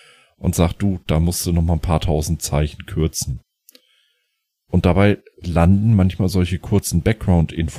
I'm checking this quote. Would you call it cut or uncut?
uncut